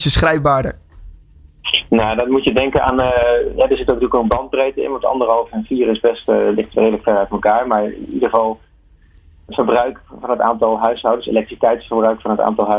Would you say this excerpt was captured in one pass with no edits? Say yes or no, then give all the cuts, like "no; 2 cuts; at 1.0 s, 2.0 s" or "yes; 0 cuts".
yes; 0 cuts